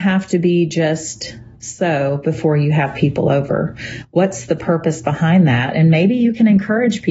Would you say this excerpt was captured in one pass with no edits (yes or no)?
yes